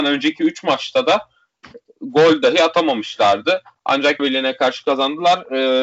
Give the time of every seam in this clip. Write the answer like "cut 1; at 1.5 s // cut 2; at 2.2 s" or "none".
cut 1; at 4.2 s